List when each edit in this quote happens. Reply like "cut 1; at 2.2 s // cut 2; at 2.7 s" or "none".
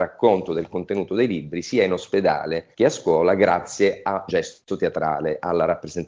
cut 1; at 2.7 s // cut 2; at 4.3 s